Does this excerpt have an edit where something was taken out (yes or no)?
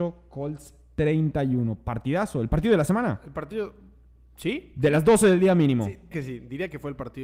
yes